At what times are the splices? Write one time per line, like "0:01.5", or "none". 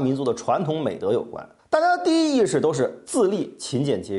0:01.6

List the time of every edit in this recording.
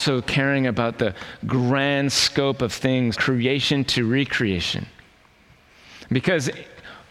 0:03.1

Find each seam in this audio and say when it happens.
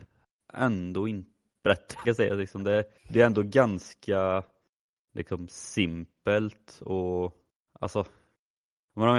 0:01.4
0:02.0
0:03.0
0:07.5

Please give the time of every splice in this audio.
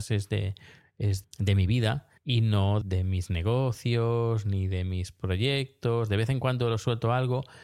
0:01.2
0:02.2
0:02.8

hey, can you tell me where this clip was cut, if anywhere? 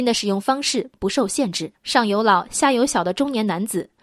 0:01.8

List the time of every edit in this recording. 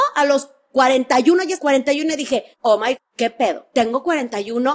0:01.6
0:02.5
0:03.0

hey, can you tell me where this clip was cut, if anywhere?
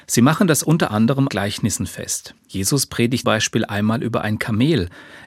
0:01.3
0:02.4
0:03.2

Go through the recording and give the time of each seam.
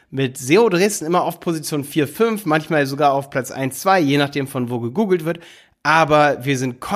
none

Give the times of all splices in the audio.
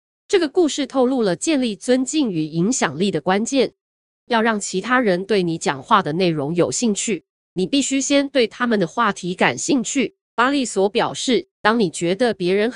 0:10.2
0:11.5

